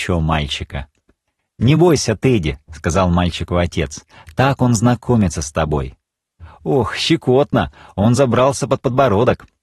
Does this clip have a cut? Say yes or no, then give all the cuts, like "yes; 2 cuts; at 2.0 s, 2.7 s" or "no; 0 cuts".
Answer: no; 0 cuts